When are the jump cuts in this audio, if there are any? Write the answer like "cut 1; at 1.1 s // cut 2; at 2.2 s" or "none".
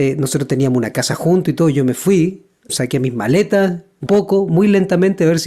cut 1; at 2.7 s // cut 2; at 4.1 s